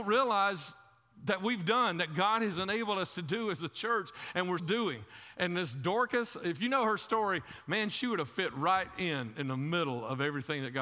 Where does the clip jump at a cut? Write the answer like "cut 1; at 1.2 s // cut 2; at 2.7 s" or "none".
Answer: cut 1; at 4.6 s